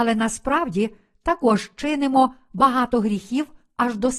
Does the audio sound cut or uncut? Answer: uncut